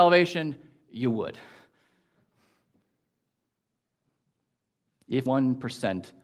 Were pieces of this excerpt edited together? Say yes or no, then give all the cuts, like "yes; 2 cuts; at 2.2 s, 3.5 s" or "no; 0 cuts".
yes; 1 cut; at 5.3 s